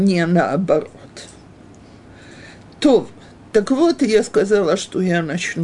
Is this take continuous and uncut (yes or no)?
yes